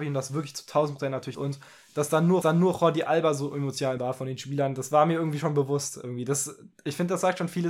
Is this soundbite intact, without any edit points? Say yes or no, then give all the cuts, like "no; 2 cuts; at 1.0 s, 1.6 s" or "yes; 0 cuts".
no; 3 cuts; at 1.3 s, 2.4 s, 4.0 s